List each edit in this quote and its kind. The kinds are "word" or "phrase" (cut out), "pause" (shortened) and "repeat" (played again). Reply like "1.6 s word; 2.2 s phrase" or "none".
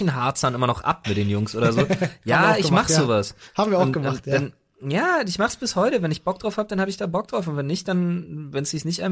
1.0 s word